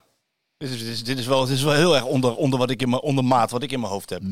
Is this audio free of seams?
yes; 0 cuts

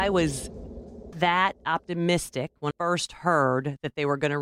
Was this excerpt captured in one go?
no; 2 cuts; at 1.1 s, 2.7 s

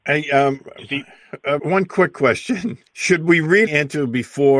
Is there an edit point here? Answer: yes; 3 cuts; at 1.6 s, 2.9 s, 3.7 s

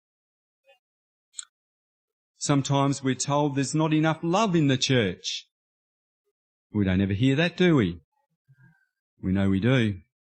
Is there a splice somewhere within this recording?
no; 0 cuts

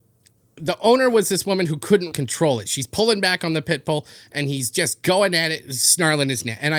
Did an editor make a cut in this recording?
yes; 1 cut; at 2.1 s

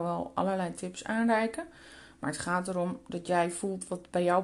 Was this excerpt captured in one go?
yes; 0 cuts

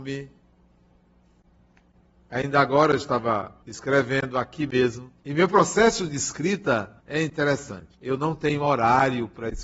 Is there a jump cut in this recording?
yes; 4 cuts; at 3.6 s, 5.2 s, 7.0 s, 7.9 s

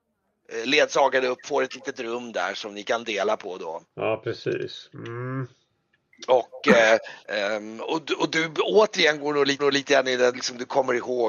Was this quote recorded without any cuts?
no; 5 cuts; at 1.4 s, 3.9 s, 7.2 s, 9.6 s, 10.3 s

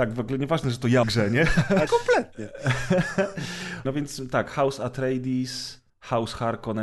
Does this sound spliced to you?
yes; 4 cuts; at 1.0 s, 1.9 s, 3.8 s, 5.9 s

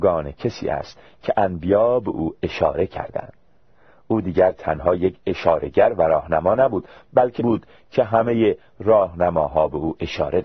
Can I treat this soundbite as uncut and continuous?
no; 1 cut; at 7.4 s

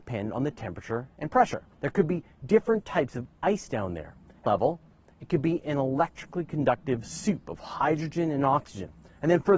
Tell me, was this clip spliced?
yes; 2 cuts; at 1.7 s, 4.5 s

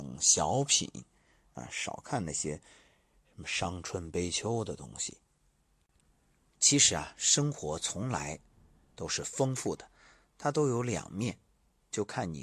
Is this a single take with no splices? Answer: yes; 0 cuts

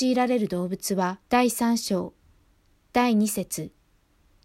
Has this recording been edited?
yes; 1 cut; at 1.2 s

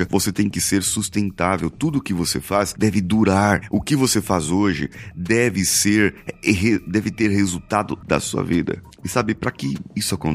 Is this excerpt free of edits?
no; 1 cut; at 8.0 s

